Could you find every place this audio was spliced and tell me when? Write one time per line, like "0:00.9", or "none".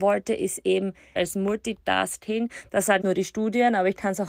0:01.2
0:03.0